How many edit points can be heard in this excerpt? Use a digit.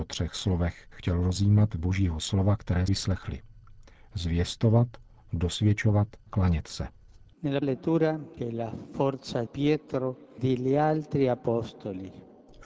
8